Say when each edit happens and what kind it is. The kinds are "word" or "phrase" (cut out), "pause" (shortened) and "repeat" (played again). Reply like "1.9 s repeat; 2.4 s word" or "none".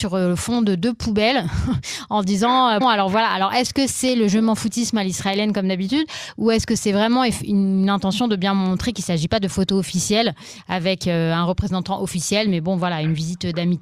2.8 s word